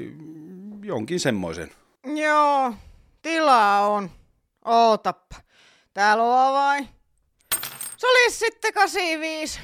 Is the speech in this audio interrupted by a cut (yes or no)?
no